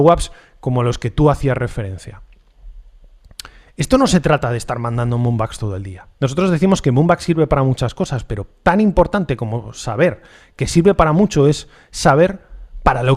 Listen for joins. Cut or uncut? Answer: cut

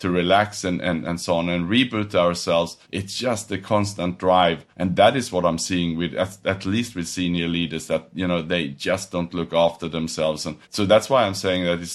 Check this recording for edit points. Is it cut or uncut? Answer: cut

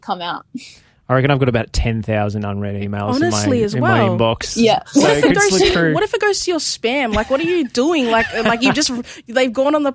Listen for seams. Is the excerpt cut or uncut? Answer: uncut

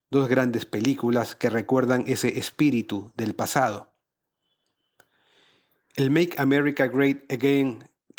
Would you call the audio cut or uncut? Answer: uncut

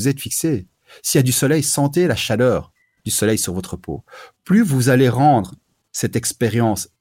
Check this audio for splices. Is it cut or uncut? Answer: uncut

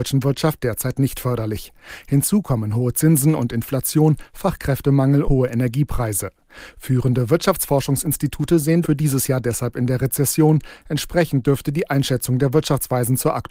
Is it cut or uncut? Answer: cut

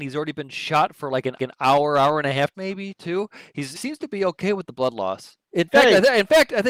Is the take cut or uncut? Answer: cut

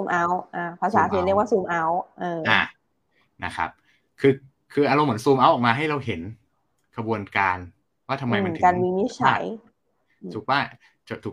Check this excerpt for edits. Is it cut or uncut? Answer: uncut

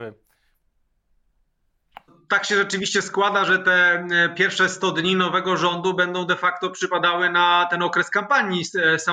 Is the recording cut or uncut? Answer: uncut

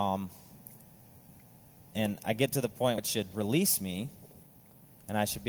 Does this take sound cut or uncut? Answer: cut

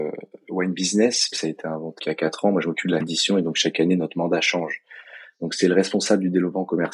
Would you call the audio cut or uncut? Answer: cut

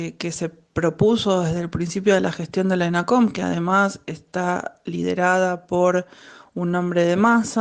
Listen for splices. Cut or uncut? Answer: uncut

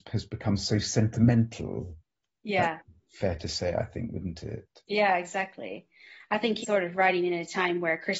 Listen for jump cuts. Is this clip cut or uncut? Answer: cut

